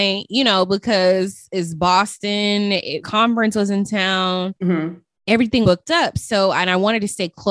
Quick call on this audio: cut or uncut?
cut